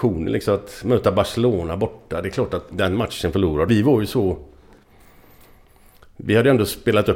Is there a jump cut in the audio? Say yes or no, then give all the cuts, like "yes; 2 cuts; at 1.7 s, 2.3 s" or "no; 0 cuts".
yes; 2 cuts; at 2.7 s, 3.7 s